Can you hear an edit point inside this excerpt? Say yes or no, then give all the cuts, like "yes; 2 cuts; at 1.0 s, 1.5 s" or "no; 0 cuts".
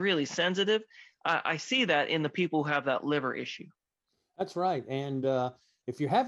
no; 0 cuts